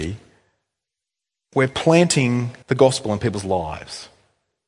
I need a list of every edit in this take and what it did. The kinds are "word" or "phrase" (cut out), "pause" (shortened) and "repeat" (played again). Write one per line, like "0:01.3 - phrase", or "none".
0:02.6 - pause